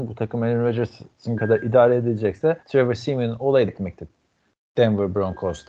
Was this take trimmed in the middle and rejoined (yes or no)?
yes